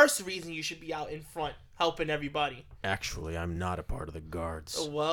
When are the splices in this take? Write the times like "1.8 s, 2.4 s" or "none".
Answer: none